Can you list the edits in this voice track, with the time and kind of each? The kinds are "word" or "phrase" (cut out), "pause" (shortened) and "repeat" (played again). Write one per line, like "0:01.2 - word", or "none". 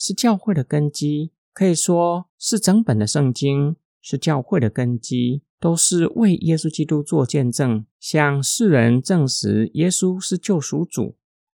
0:01.4 - pause
0:05.5 - pause
0:07.9 - pause